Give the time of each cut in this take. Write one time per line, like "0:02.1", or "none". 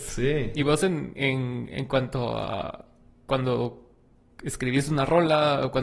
none